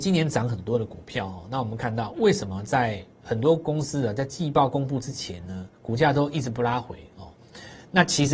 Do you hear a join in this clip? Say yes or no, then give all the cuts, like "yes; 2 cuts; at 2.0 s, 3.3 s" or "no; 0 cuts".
yes; 1 cut; at 5.7 s